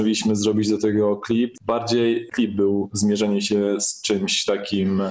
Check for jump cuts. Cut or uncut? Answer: cut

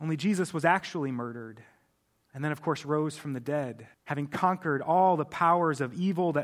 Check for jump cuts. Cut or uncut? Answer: cut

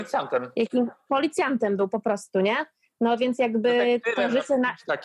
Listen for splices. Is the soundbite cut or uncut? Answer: uncut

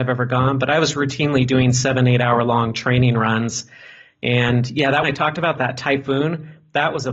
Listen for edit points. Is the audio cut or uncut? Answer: cut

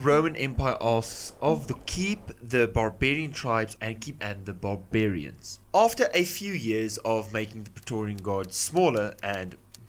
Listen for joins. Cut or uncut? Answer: cut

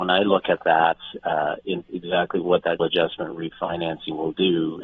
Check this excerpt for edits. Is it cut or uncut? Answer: cut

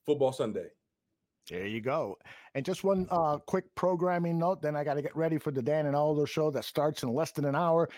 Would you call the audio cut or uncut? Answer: uncut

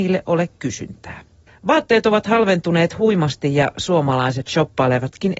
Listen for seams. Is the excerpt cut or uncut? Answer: cut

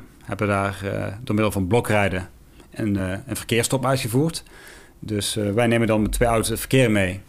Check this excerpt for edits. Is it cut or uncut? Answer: uncut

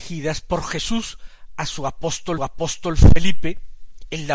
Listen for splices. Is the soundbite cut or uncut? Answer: cut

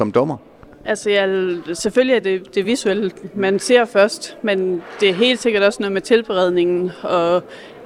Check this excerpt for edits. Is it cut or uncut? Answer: uncut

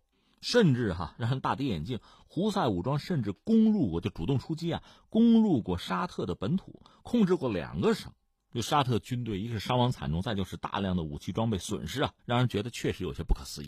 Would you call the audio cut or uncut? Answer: cut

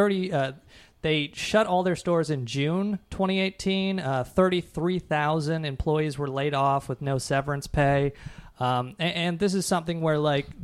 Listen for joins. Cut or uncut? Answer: uncut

